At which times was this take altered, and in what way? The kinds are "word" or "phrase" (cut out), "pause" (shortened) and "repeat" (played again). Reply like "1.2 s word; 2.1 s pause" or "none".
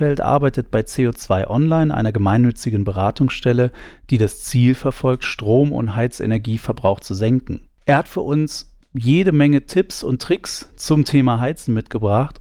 none